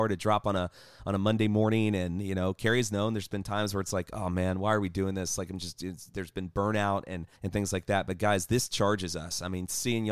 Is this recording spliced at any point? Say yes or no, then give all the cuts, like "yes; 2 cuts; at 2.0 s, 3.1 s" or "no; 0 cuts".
yes; 1 cut; at 7.4 s